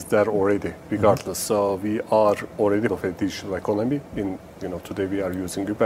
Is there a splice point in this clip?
yes; 1 cut; at 2.9 s

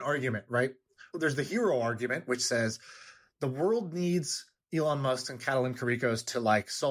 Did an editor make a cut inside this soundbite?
no; 0 cuts

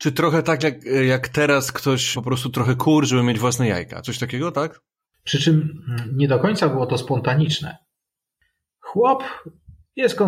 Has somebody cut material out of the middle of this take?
yes; 2 cuts; at 2.1 s, 5.0 s

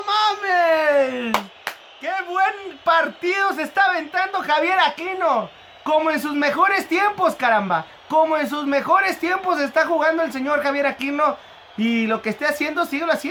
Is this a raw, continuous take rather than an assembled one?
yes; 0 cuts

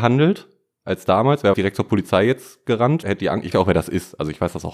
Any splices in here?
yes; 3 cuts; at 1.5 s, 3.0 s, 3.5 s

